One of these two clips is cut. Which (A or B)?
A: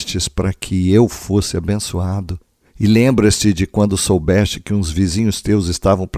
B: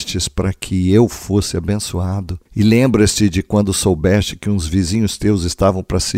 B